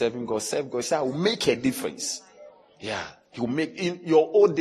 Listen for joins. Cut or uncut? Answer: uncut